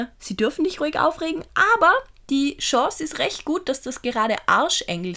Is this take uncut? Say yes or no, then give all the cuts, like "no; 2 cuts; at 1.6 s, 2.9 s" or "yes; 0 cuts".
yes; 0 cuts